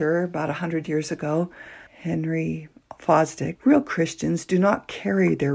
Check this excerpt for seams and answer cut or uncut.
cut